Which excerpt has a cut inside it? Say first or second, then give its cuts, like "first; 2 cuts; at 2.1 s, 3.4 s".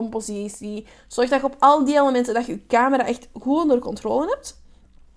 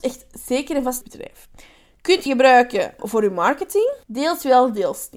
second; 4 cuts; at 1.0 s, 2.3 s, 3.0 s, 4.0 s